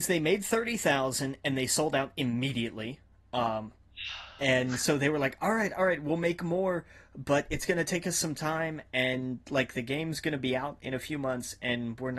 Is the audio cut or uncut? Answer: uncut